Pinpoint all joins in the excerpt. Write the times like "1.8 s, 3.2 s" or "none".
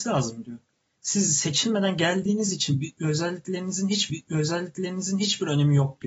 4.1 s